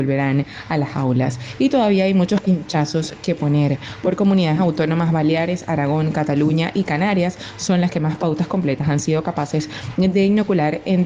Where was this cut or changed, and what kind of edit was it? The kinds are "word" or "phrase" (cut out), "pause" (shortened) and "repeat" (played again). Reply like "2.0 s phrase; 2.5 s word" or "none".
none